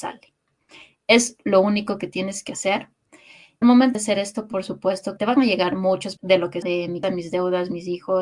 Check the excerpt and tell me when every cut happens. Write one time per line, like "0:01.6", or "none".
0:03.6
0:03.9
0:05.2
0:06.2
0:06.6
0:07.0